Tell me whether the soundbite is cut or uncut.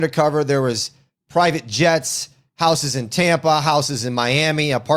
uncut